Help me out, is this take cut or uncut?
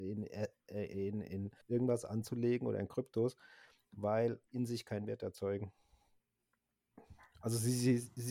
cut